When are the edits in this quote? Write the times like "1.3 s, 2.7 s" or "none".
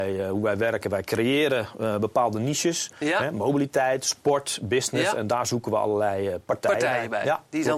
none